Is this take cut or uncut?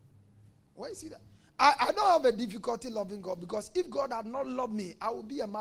uncut